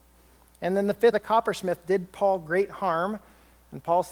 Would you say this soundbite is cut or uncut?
cut